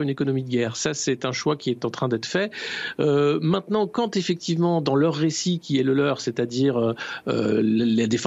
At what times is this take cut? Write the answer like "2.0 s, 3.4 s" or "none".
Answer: none